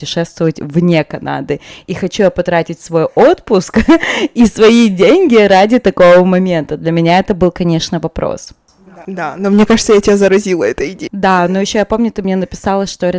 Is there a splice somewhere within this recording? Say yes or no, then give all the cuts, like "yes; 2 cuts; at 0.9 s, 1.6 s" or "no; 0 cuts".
no; 0 cuts